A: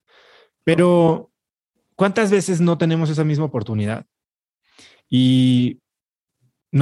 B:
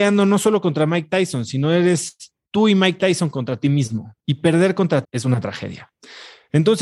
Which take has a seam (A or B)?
B